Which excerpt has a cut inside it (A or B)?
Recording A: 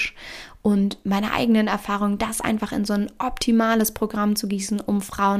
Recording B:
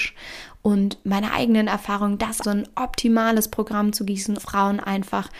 B